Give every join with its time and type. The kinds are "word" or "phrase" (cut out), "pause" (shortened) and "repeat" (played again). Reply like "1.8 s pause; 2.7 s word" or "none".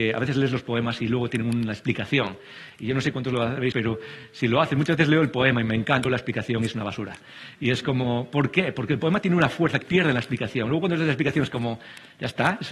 3.7 s word; 6.0 s word; 9.8 s word